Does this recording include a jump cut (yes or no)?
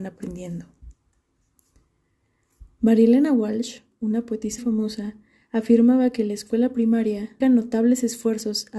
yes